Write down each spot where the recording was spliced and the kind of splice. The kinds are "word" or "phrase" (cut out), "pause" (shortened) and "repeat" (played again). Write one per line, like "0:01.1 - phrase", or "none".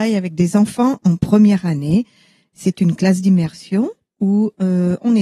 none